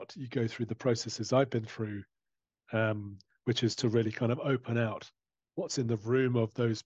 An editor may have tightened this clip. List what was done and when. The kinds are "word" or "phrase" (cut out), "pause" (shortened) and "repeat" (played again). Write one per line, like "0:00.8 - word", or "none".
none